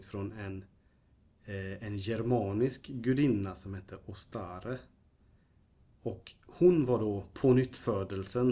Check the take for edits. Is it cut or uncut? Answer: uncut